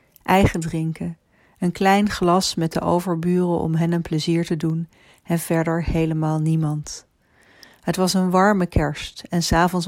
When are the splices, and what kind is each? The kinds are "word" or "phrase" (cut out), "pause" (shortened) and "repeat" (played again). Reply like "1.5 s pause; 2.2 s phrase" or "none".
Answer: none